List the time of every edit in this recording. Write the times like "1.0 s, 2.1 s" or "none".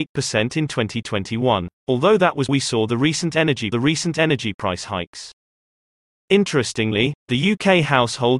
1.8 s, 2.5 s, 3.7 s